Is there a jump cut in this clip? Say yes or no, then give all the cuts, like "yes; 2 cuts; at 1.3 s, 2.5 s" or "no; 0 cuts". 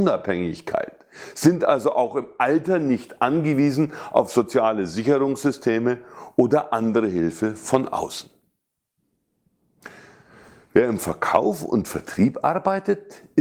no; 0 cuts